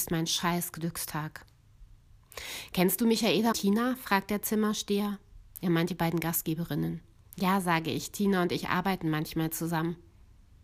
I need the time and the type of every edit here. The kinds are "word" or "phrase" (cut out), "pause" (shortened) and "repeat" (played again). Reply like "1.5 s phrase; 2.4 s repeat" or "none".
3.5 s word; 5.5 s pause; 7.2 s pause